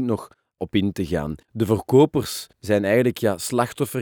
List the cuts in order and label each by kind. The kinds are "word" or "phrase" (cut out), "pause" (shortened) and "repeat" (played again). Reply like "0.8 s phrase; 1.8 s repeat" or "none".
1.4 s pause